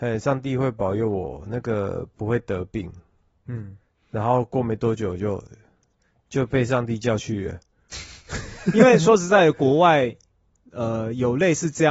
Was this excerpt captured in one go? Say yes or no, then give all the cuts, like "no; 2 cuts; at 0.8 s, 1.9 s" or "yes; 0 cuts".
yes; 0 cuts